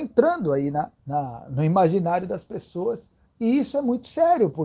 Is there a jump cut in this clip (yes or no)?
yes